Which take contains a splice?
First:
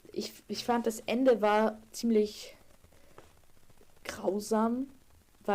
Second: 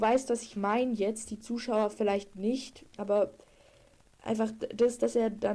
second; 1 cut; at 2.9 s

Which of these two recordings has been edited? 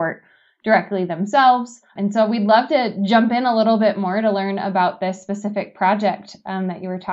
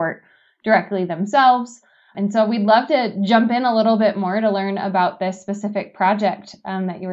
first; 1 cut; at 1.9 s

